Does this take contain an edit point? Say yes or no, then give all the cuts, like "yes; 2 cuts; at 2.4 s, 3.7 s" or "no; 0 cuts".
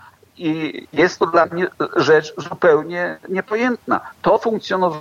no; 0 cuts